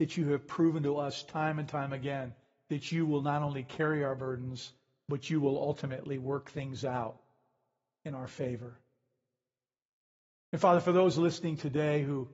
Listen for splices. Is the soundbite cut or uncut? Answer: uncut